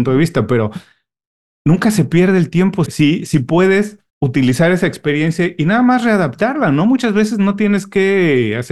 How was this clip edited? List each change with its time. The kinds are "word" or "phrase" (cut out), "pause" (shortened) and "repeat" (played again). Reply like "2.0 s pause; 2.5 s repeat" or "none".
2.9 s word; 4.1 s pause